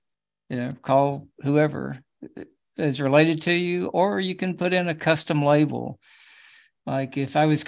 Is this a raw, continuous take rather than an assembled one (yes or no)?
yes